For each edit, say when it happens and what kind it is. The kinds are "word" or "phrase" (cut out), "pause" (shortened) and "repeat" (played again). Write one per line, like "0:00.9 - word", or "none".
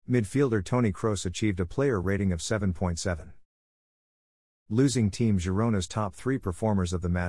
none